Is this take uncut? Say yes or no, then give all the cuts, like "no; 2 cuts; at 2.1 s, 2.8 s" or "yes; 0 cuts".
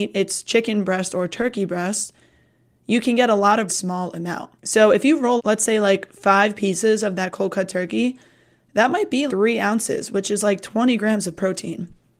no; 4 cuts; at 3.7 s, 4.6 s, 5.4 s, 9.3 s